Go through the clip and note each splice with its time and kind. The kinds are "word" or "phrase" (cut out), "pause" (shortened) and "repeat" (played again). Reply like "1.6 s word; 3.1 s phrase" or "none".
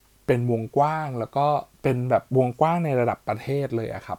1.7 s pause; 2.3 s pause

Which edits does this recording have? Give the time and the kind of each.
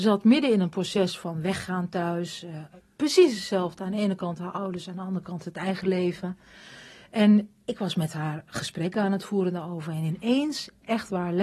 none

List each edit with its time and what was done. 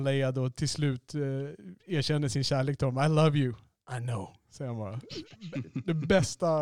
1.8 s pause

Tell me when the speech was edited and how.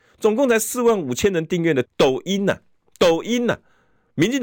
1.8 s word

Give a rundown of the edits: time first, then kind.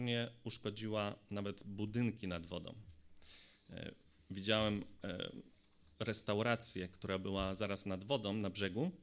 none

